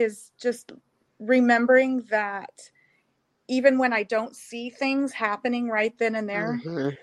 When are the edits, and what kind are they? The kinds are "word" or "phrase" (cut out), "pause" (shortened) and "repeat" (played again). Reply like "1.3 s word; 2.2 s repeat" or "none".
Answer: none